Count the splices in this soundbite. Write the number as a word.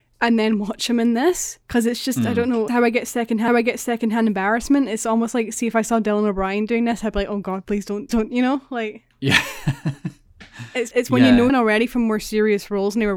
seven